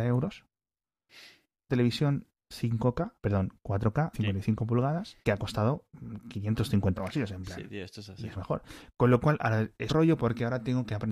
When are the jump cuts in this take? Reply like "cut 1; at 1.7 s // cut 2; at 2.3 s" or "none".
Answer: cut 1; at 1.7 s // cut 2; at 3.2 s // cut 3; at 4.1 s // cut 4; at 5.2 s // cut 5; at 7.0 s // cut 6; at 8.4 s // cut 7; at 9.9 s